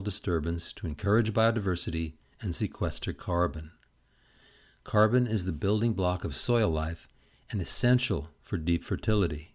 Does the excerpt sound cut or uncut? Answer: uncut